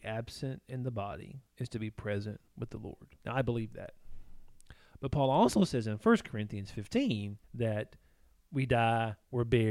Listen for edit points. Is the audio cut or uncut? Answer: cut